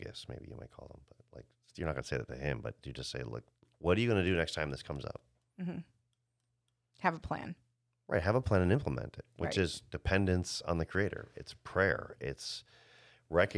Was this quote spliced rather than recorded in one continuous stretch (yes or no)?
no